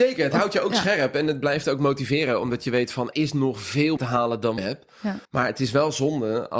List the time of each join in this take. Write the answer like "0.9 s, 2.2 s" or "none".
3.1 s, 4.0 s, 4.6 s, 5.2 s